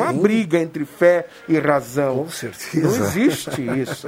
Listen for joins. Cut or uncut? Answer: uncut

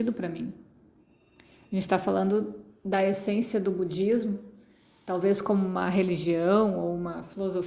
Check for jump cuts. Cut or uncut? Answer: uncut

